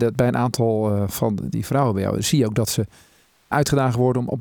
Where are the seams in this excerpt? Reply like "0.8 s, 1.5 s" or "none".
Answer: 3.5 s